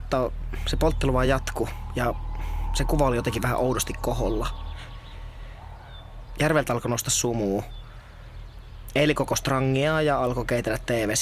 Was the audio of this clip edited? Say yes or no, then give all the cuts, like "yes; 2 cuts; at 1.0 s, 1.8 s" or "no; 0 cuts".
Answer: no; 0 cuts